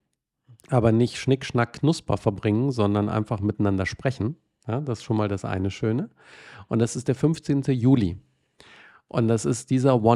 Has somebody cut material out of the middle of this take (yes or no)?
no